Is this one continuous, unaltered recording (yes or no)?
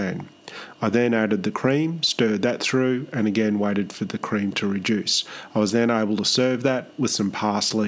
yes